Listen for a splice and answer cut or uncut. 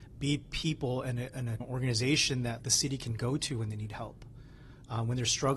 cut